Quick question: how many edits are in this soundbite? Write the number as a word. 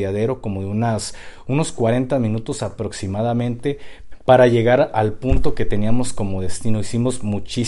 zero